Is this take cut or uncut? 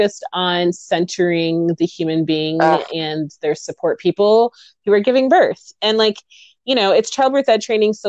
uncut